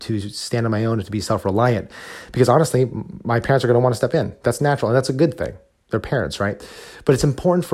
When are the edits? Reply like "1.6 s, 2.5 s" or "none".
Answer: none